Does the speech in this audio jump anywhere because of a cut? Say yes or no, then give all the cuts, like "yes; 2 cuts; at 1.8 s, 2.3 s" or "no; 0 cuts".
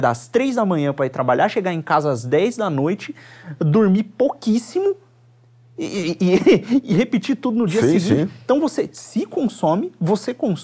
no; 0 cuts